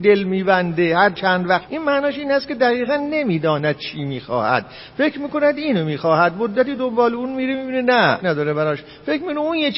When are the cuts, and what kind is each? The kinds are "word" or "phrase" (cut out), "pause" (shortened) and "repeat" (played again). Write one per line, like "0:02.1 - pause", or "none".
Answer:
0:01.7 - phrase
0:08.2 - word